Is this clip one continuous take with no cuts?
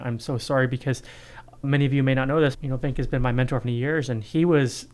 no; 3 cuts; at 1.6 s, 2.5 s, 3.6 s

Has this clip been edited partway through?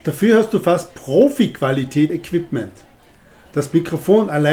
yes; 1 cut; at 2.1 s

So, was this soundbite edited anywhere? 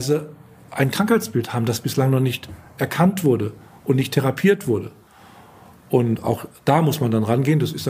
no; 0 cuts

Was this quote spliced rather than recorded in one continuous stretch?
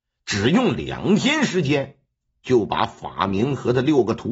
no; 0 cuts

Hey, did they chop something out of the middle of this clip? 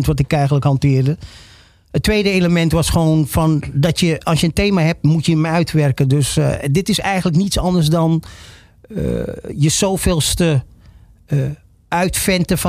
no; 0 cuts

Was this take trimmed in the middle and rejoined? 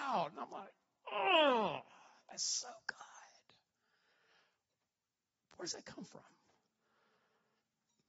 no; 0 cuts

